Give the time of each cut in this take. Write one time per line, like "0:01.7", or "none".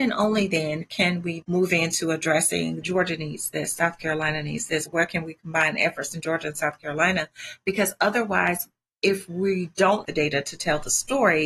0:01.4
0:02.8
0:10.0